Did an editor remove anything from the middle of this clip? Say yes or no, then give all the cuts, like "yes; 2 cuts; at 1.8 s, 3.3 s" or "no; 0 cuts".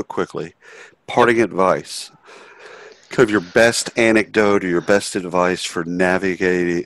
no; 0 cuts